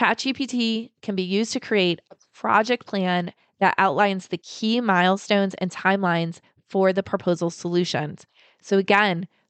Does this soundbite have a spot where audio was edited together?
no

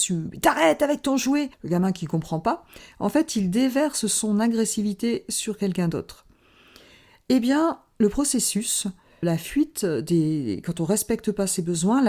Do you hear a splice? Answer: yes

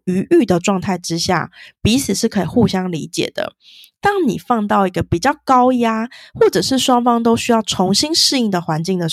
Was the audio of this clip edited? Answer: no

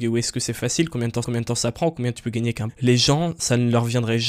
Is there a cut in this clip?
yes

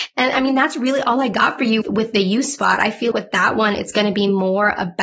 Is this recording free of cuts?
no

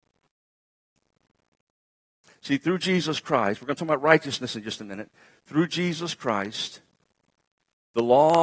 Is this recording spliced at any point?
no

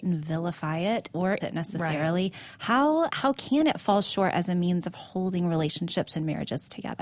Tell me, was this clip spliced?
yes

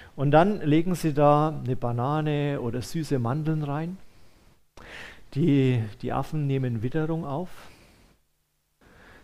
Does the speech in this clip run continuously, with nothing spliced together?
yes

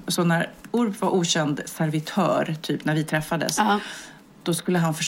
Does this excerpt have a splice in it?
no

